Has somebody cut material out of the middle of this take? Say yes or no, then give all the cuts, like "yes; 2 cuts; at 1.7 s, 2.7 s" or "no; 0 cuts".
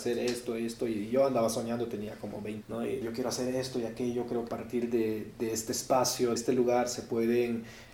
yes; 4 cuts; at 2.6 s, 3.0 s, 4.5 s, 6.4 s